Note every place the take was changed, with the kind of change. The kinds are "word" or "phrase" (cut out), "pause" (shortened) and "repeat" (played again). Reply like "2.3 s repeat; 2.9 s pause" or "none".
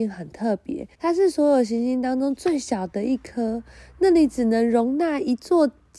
0.9 s pause